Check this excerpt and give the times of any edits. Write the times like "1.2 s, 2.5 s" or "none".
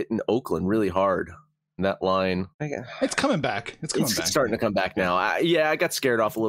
1.8 s, 2.5 s